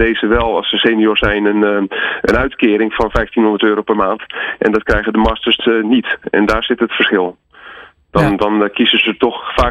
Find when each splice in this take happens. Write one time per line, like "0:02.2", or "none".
none

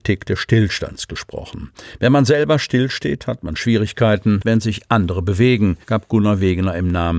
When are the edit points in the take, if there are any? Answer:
0:04.4
0:05.8

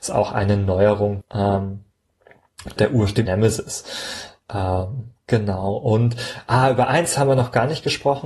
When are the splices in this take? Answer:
0:01.2
0:02.8
0:03.3

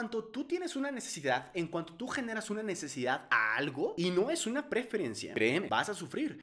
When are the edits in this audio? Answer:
none

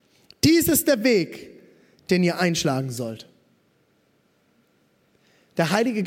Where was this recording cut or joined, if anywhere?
none

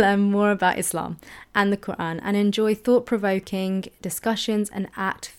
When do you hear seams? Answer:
none

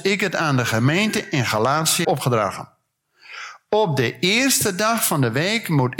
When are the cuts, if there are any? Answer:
0:02.0

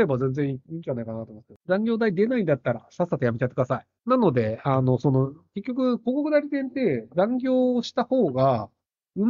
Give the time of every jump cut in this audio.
0:01.6
0:04.0

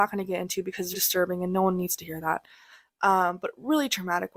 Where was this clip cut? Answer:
0:00.9

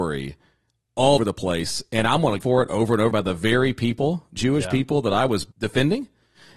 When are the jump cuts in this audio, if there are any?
0:01.2
0:02.4
0:03.1
0:04.4
0:05.5

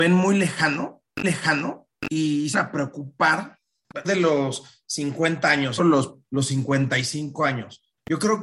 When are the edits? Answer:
0:01.2
0:02.5
0:04.0
0:05.8
0:06.2

